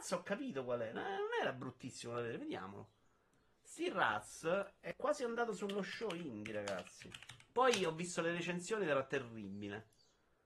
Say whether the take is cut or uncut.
uncut